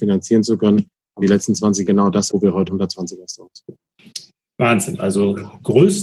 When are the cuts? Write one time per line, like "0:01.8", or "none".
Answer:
0:01.2
0:01.9
0:02.3
0:02.7